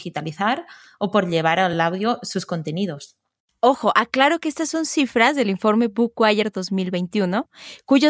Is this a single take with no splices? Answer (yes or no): yes